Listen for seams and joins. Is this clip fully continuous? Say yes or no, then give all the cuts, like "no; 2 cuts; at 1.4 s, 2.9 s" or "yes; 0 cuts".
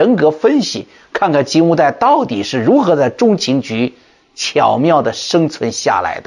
yes; 0 cuts